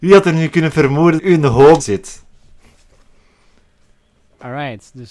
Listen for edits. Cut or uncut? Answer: cut